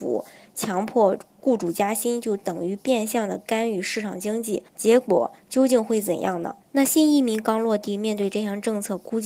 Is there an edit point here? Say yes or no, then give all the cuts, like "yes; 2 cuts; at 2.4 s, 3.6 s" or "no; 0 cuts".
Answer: yes; 2 cuts; at 4.7 s, 6.6 s